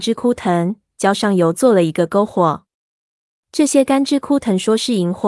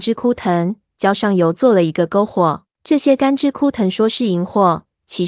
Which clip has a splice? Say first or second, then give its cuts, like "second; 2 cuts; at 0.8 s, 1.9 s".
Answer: second; 1 cut; at 2.7 s